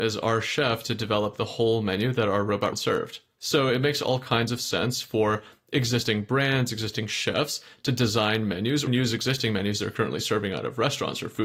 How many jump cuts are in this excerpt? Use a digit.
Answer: 2